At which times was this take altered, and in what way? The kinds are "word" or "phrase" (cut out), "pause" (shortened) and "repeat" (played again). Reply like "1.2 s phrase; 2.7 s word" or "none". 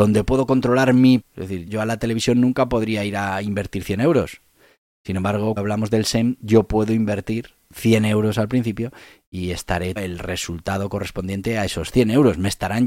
1.2 s word; 1.7 s word; 5.6 s word; 10.0 s word